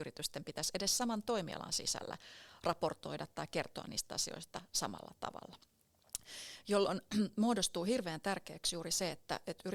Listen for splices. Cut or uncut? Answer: uncut